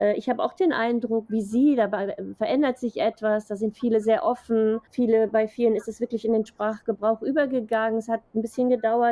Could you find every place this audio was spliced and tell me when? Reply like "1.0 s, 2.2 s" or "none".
4.8 s, 6.5 s